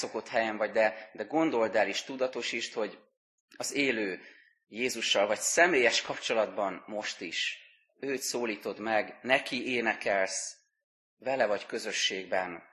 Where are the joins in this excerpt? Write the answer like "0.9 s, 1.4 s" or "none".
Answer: none

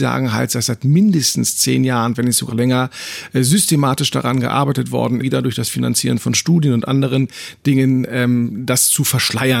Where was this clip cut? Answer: 2.5 s, 5.2 s

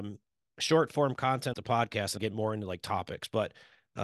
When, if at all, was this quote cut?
1.5 s, 2.2 s

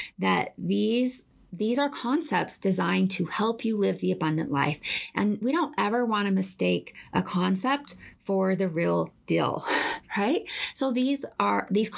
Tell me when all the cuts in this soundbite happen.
none

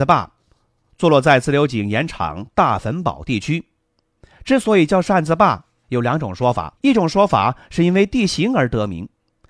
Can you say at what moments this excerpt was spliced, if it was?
6.8 s

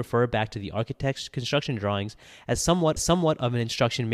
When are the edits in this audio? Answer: 3.0 s

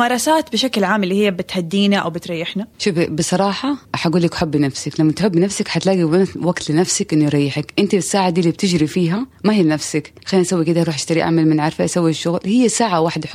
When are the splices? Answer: 2.7 s, 3.8 s, 9.3 s, 10.2 s

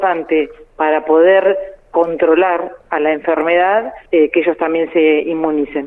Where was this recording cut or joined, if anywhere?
2.8 s, 4.1 s

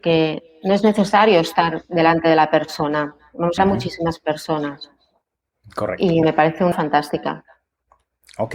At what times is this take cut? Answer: 3.6 s, 6.2 s, 6.7 s

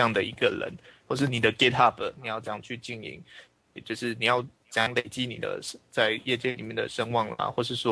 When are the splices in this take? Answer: none

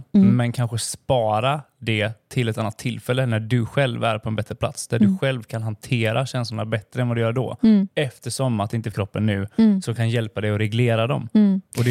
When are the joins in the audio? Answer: 8.9 s

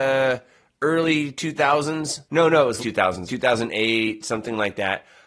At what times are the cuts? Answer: 2.2 s, 2.8 s, 3.3 s

